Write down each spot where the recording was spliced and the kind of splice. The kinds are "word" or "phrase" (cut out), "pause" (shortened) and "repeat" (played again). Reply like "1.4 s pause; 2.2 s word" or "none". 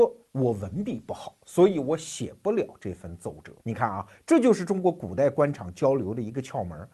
3.6 s pause

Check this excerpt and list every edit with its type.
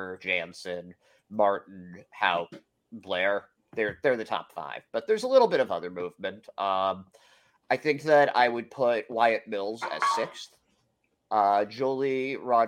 none

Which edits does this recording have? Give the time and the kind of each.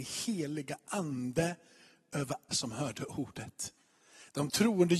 2.5 s word

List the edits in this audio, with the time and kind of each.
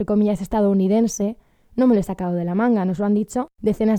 none

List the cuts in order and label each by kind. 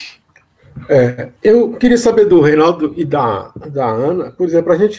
1.4 s pause

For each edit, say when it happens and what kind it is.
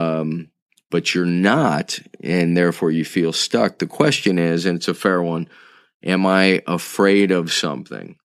none

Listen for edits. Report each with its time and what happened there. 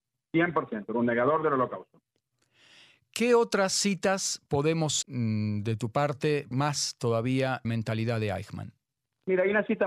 5.0 s phrase; 6.5 s phrase; 7.6 s word

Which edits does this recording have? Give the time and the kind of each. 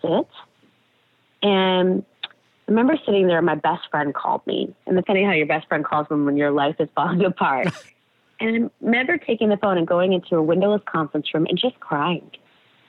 5.0 s word; 7.9 s pause

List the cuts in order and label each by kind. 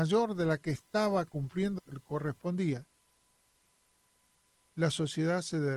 1.8 s word

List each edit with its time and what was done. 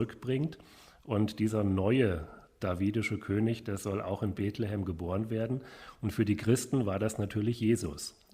none

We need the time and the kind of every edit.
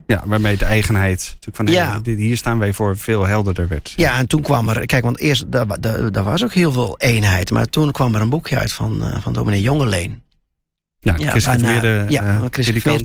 none

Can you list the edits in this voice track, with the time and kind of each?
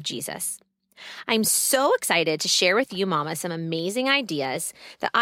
none

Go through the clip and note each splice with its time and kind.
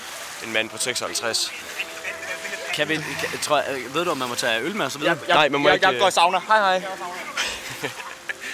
none

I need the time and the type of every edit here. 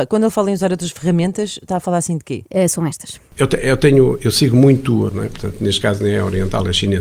5.1 s phrase

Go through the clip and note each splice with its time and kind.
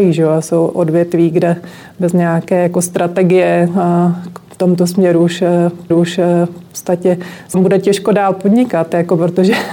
5.9 s repeat; 7.5 s word

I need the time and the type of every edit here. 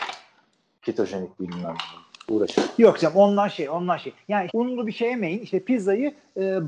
1.4 s phrase; 2.1 s pause; 4.5 s phrase

